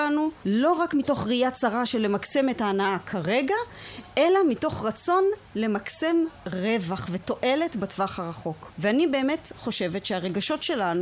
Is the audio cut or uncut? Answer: uncut